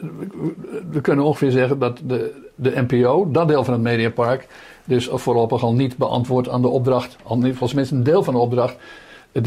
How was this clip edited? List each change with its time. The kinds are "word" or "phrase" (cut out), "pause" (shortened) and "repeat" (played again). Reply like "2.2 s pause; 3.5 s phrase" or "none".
none